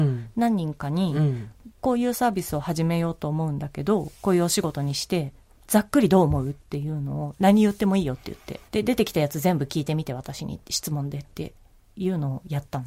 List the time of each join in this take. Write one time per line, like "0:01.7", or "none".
0:06.6
0:08.7